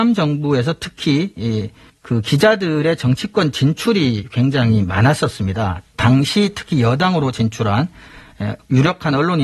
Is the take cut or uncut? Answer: uncut